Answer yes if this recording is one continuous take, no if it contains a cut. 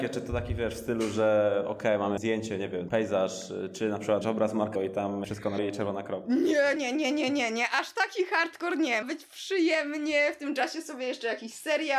no